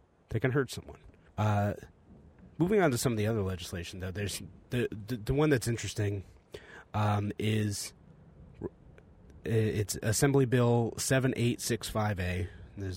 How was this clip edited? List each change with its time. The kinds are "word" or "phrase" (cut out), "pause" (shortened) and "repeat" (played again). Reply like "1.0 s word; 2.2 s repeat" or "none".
1.3 s pause